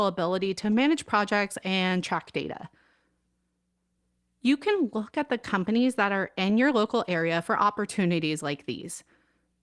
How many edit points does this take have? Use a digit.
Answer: 0